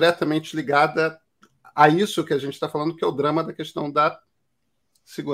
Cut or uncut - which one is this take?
uncut